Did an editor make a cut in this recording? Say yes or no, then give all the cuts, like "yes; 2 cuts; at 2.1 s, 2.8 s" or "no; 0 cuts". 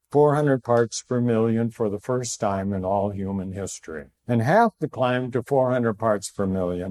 yes; 1 cut; at 4.2 s